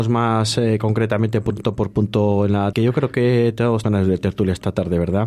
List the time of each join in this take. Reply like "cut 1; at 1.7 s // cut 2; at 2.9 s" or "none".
cut 1; at 2.7 s // cut 2; at 3.8 s